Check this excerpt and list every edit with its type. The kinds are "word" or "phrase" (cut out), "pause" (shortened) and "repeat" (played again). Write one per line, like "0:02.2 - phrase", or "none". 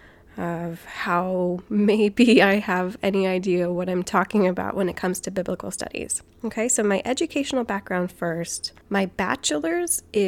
0:08.8 - pause